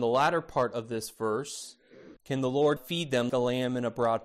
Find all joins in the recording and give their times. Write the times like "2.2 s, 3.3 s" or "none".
2.2 s, 2.8 s, 3.3 s